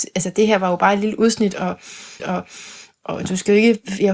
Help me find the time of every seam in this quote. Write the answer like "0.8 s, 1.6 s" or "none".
2.2 s